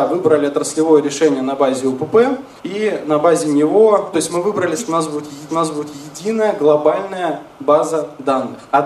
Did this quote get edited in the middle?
yes; 4 cuts; at 2.6 s, 4.1 s, 4.8 s, 5.5 s

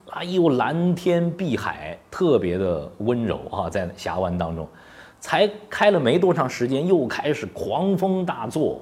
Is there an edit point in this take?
no; 0 cuts

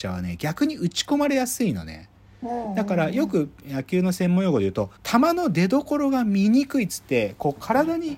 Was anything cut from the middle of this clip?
yes; 1 cut; at 5.0 s

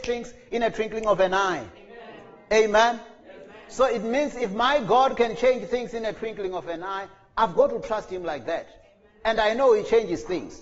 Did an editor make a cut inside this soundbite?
no; 0 cuts

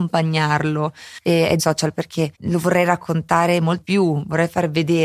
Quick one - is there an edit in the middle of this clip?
yes; 3 cuts; at 1.6 s, 2.3 s, 3.8 s

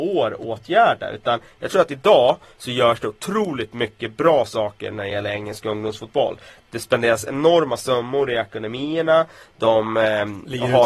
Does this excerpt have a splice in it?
no; 0 cuts

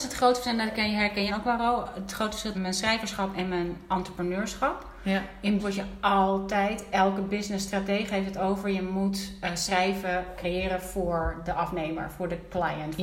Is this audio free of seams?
no; 3 cuts; at 1.3 s, 2.5 s, 5.6 s

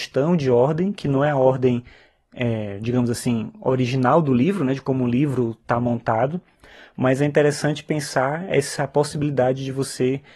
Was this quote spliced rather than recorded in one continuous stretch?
no; 0 cuts

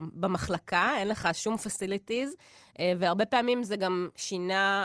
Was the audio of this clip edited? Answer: no; 0 cuts

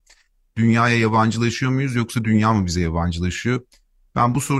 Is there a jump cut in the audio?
no; 0 cuts

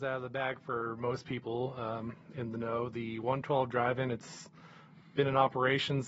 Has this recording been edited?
no; 0 cuts

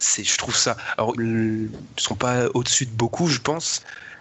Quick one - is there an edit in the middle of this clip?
yes; 1 cut; at 1.1 s

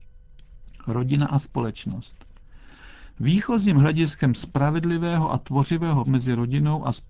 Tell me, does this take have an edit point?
yes; 1 cut; at 6.1 s

